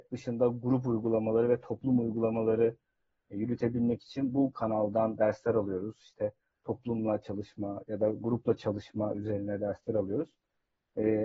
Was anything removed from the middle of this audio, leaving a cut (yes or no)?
no